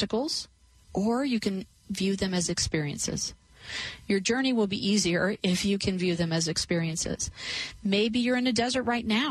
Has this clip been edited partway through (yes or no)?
no